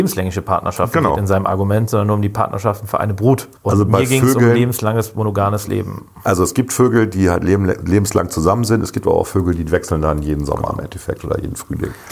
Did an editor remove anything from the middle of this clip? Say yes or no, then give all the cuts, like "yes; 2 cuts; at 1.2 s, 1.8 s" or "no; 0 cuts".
yes; 1 cut; at 3.6 s